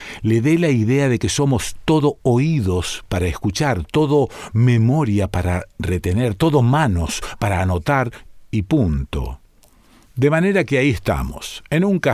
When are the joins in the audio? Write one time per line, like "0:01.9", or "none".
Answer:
none